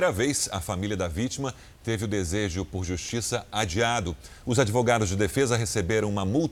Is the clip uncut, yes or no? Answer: yes